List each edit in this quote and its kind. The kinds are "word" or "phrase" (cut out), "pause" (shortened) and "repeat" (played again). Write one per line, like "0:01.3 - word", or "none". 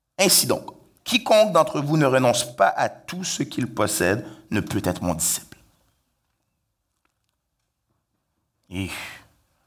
none